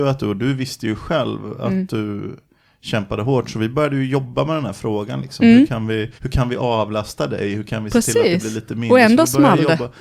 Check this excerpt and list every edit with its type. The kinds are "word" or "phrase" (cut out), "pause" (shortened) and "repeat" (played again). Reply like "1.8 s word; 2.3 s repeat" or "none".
6.2 s pause